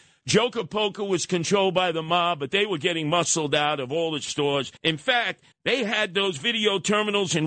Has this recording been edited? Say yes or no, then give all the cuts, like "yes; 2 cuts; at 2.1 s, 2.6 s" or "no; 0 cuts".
yes; 2 cuts; at 4.8 s, 5.5 s